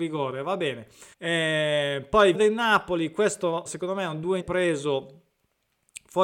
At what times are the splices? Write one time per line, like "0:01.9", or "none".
0:01.1
0:02.3
0:03.7
0:04.4